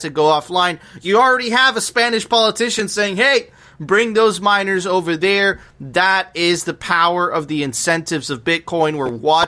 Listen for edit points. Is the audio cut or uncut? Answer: uncut